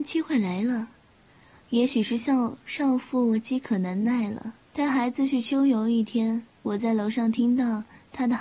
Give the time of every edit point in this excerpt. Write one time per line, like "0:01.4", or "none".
0:04.6
0:06.5

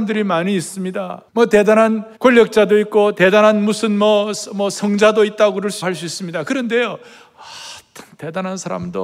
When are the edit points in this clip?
0:01.3
0:02.2
0:05.8

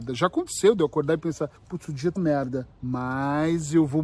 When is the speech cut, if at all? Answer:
0:01.6
0:02.2
0:02.7

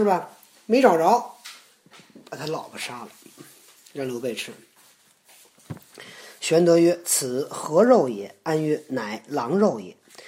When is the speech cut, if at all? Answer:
0:01.9

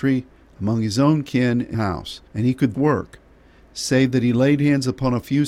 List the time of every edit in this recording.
0:01.7
0:02.3
0:02.7

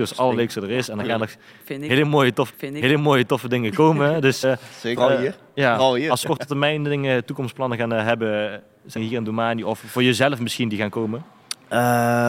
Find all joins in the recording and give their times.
0:02.5
0:04.4
0:06.2
0:09.0

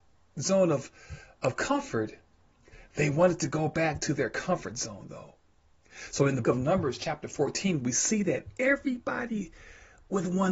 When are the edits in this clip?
0:06.4

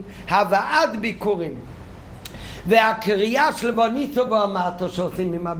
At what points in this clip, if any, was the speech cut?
none

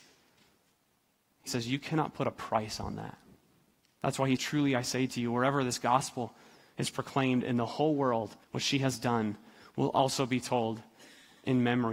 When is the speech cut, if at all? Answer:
0:01.5
0:03.4
0:04.4
0:08.4

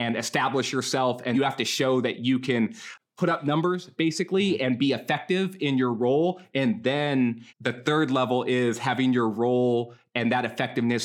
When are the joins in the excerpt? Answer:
0:01.3
0:07.5

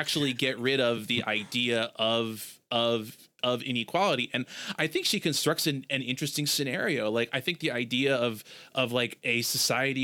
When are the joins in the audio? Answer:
none

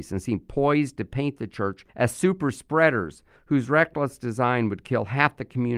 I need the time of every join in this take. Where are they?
0:01.9

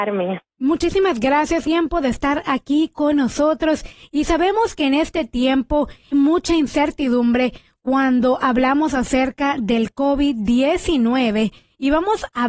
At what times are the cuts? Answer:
0:01.6
0:06.1

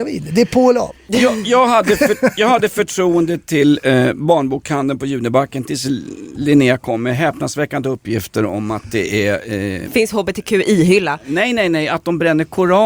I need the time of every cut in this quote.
none

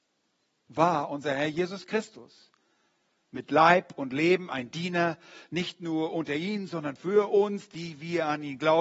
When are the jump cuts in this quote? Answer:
none

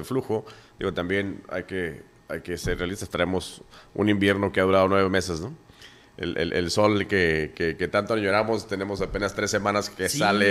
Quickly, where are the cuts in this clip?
none

